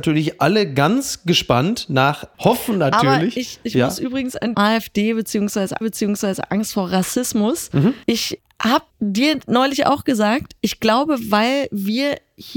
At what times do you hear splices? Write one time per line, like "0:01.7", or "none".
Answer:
0:02.3
0:04.5
0:05.8
0:08.0
0:08.9